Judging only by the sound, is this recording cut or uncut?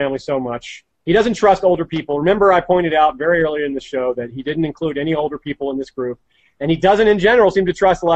uncut